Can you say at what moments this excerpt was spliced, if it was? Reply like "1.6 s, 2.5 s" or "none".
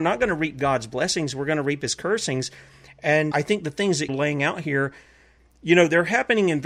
3.3 s, 4.1 s

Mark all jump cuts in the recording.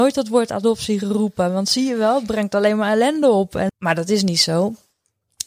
3.7 s

